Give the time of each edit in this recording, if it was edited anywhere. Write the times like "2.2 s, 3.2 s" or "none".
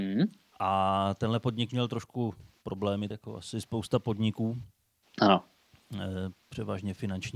3.1 s